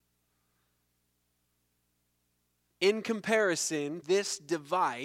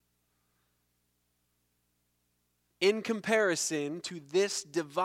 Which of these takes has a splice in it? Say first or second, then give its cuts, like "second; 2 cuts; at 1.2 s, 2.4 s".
first; 1 cut; at 4.0 s